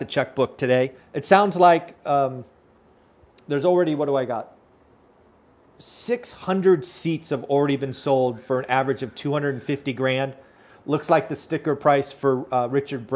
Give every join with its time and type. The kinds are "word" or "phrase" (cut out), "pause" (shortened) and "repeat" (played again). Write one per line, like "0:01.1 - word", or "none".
0:01.0 - pause

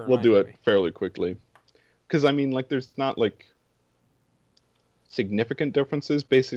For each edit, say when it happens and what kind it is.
none

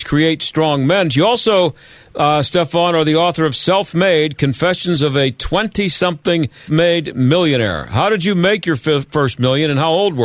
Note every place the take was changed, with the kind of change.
0:06.7 - word

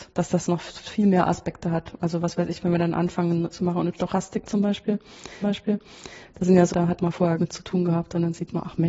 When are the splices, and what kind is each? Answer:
0:03.5 - word
0:05.4 - repeat
0:06.7 - word
0:07.4 - phrase

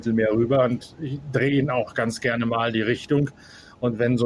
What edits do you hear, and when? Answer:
none

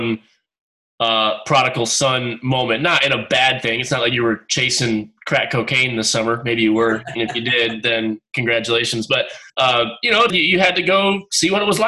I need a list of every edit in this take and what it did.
0:09.5 - pause
0:10.3 - word

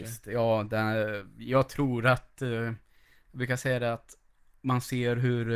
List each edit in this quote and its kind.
none

